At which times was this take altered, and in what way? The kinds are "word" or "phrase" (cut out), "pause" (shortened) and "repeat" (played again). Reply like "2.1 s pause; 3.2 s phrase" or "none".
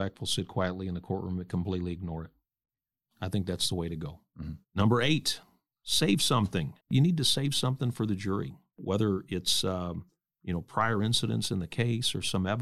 4.6 s pause; 6.8 s pause

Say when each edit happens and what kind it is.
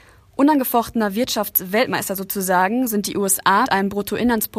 3.6 s word

